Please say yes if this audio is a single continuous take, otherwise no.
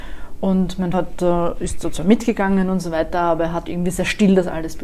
no